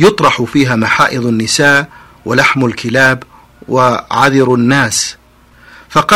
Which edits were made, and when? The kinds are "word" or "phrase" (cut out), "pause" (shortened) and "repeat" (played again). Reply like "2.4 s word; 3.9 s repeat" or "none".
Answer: none